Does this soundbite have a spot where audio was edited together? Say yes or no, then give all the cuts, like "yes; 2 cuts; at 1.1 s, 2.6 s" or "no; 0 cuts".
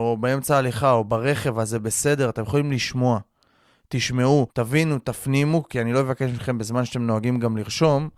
yes; 1 cut; at 4.5 s